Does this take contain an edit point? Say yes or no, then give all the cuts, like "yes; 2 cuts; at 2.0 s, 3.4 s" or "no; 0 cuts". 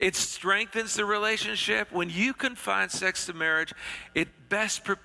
no; 0 cuts